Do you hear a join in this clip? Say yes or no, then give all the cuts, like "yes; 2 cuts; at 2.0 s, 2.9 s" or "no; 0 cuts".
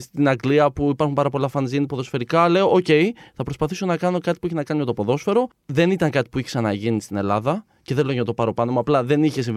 no; 0 cuts